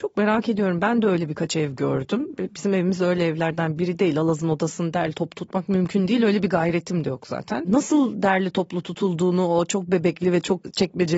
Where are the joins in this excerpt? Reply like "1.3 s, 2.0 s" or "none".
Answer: none